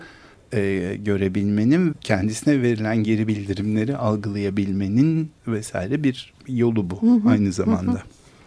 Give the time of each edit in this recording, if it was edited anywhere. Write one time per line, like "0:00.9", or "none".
0:01.9
0:05.4
0:06.4

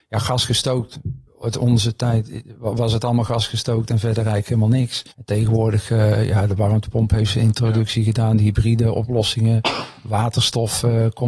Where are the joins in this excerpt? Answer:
0:01.3
0:05.1

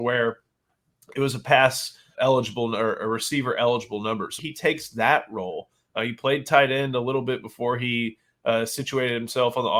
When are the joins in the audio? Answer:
0:02.1
0:04.4

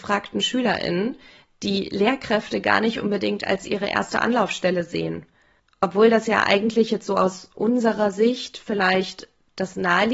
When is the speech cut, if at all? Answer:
none

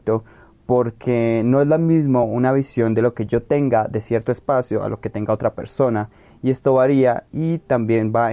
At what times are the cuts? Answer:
none

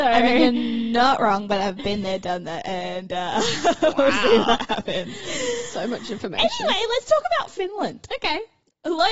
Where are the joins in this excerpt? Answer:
none

